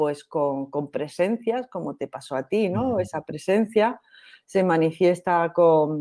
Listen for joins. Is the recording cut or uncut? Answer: uncut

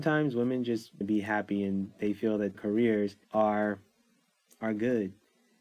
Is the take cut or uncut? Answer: cut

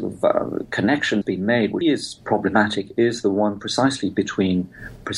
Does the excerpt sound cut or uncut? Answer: cut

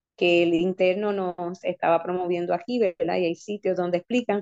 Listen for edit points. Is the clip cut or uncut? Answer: uncut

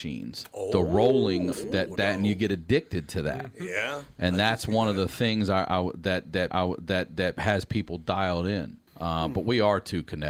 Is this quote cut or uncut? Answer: cut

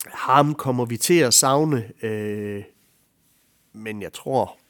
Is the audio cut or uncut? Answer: uncut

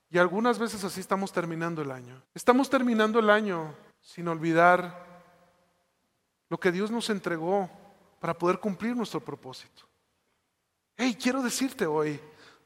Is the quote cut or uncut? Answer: cut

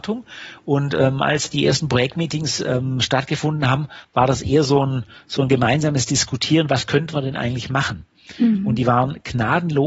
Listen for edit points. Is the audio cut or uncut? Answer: uncut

